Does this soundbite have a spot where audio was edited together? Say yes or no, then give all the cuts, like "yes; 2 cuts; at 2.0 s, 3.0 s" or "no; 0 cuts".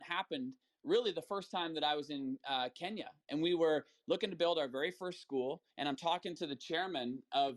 yes; 1 cut; at 5.7 s